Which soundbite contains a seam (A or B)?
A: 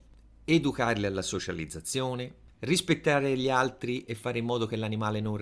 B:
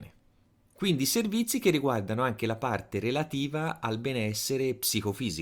A